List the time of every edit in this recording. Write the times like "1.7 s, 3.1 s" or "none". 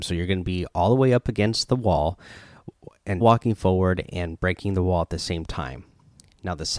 3.2 s